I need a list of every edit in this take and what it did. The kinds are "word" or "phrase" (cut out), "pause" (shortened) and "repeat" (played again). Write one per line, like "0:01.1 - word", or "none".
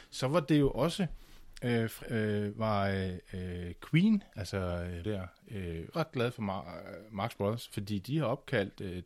0:02.0 - word
0:05.0 - word
0:05.9 - word